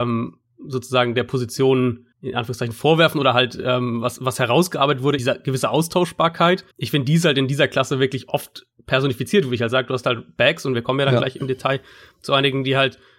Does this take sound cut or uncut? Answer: cut